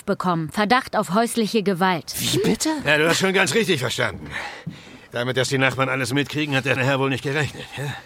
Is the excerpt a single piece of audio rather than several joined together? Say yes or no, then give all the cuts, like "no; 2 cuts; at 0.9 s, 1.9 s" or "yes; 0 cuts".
no; 1 cut; at 6.8 s